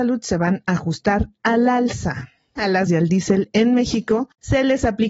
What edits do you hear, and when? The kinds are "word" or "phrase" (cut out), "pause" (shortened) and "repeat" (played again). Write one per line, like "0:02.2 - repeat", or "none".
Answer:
0:02.9 - word